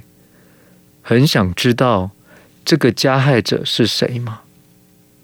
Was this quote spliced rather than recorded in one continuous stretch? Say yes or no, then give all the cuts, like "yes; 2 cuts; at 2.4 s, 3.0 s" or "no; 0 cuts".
no; 0 cuts